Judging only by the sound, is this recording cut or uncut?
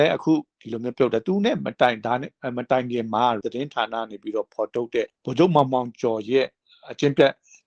cut